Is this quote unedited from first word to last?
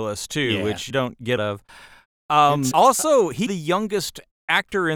no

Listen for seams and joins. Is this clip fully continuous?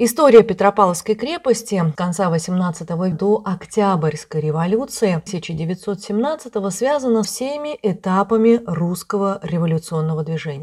no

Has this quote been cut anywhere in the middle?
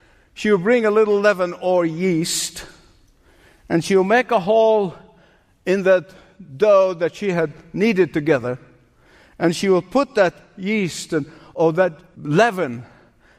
no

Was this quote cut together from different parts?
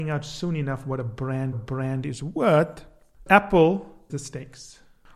yes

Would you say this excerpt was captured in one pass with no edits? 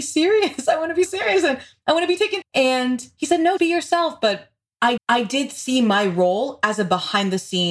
no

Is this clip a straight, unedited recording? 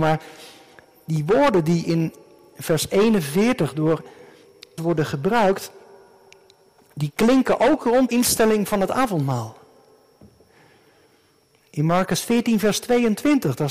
no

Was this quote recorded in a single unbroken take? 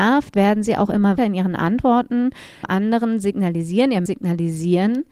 no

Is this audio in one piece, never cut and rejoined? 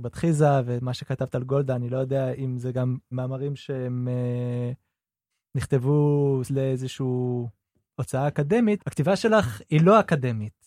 no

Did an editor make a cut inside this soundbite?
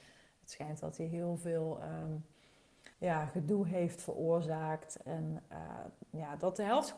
yes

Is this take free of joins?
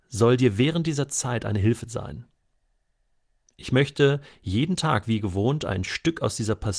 yes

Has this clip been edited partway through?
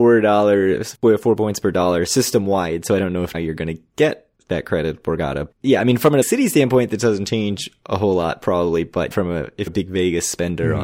yes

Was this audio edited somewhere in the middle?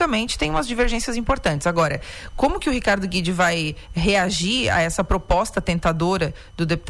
no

